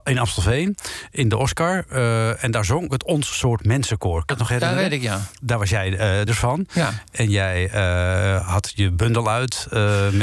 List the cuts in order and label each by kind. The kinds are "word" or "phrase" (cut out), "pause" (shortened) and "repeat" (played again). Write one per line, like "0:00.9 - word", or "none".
0:02.9 - word
0:04.3 - word
0:06.3 - phrase